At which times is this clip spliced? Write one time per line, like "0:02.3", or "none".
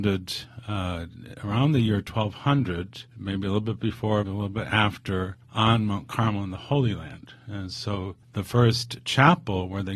0:03.1
0:04.2
0:05.4
0:08.2